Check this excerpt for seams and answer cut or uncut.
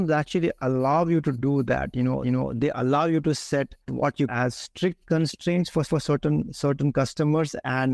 cut